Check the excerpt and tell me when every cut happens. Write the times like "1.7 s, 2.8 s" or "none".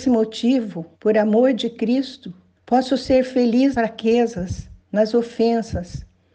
0.9 s, 2.6 s, 3.7 s, 4.8 s